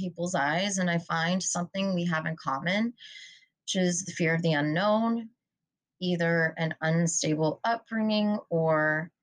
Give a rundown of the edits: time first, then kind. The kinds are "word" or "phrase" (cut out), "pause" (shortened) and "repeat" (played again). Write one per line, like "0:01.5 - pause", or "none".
none